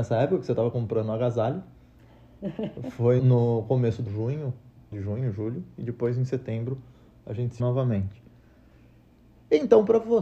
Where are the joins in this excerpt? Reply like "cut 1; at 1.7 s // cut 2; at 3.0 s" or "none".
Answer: cut 1; at 3.2 s // cut 2; at 4.1 s // cut 3; at 4.9 s // cut 4; at 7.6 s